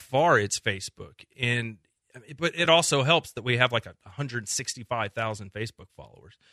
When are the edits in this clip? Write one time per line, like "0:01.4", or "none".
none